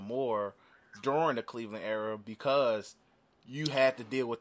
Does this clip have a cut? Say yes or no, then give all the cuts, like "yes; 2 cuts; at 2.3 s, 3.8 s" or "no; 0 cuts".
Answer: no; 0 cuts